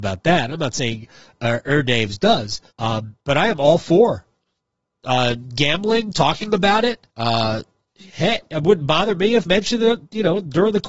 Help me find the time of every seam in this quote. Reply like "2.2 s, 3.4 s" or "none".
2.7 s, 7.1 s, 9.5 s